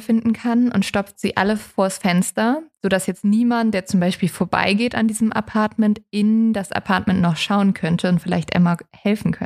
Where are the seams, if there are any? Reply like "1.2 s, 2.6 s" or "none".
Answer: none